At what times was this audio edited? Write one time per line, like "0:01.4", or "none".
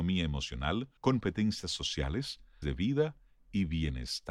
0:01.0
0:02.6